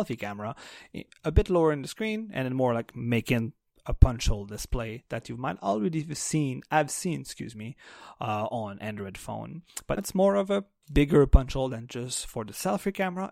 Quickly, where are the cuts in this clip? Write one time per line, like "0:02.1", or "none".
0:10.0